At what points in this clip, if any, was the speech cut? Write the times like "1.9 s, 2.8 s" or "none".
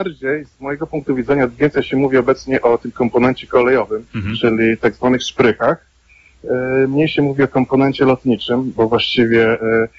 4.1 s

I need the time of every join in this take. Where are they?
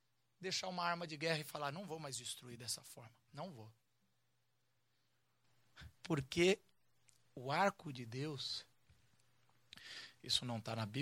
3.3 s, 6.0 s

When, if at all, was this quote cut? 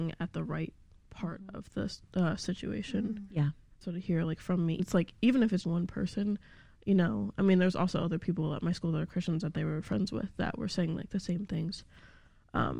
3.8 s, 4.8 s, 5.6 s

